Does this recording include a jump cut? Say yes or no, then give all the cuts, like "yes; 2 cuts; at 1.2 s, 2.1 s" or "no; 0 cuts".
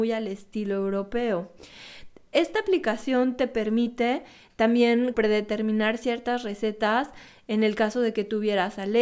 yes; 1 cut; at 5.1 s